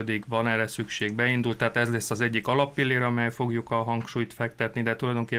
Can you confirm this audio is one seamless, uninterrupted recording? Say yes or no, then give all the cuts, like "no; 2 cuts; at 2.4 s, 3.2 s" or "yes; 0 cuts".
yes; 0 cuts